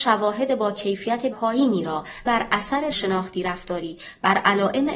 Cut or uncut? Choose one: cut